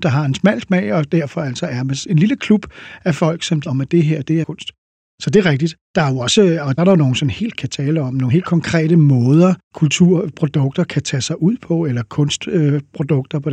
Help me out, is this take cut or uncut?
cut